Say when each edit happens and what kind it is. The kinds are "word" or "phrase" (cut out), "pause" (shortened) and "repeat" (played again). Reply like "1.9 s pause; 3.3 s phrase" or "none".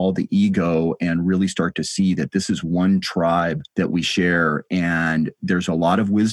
3.7 s pause